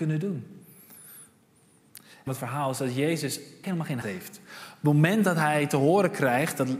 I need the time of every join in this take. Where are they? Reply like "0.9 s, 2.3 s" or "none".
2.3 s, 3.6 s, 4.0 s

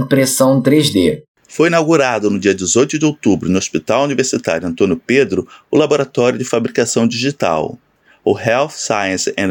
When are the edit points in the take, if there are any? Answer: 1.3 s

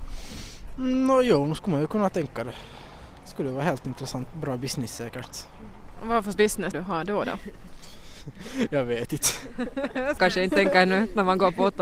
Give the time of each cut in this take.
4.3 s, 6.3 s, 6.7 s, 10.2 s

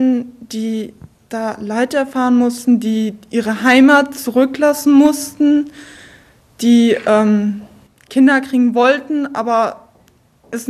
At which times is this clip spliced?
none

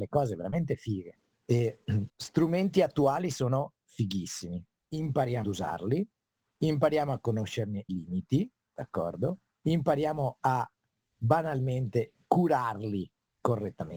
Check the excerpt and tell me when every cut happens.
2.1 s, 5.4 s, 7.9 s

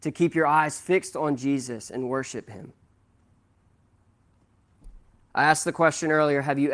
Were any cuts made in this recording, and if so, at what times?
none

